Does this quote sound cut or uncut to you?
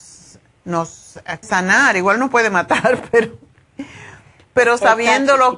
cut